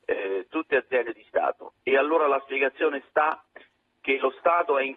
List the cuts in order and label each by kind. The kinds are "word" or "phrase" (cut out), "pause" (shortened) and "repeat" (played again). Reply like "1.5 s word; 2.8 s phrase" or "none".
none